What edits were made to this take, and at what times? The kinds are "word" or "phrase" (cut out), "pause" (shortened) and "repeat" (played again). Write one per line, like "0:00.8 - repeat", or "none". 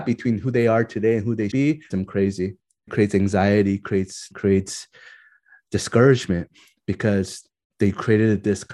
0:01.5 - word
0:01.9 - word
0:02.9 - word
0:04.3 - word